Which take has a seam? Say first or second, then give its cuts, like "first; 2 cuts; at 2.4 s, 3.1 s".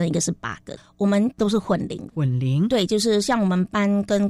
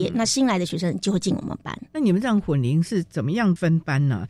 second; 1 cut; at 1.9 s